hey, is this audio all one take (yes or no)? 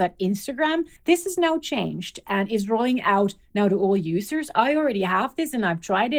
no